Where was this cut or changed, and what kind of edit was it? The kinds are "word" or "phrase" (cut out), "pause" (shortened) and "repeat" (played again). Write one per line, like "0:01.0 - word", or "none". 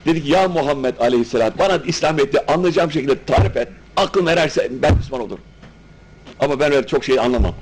0:01.5 - word
0:03.8 - pause
0:06.4 - pause